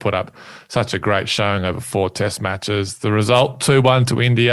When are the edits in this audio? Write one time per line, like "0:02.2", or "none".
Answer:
none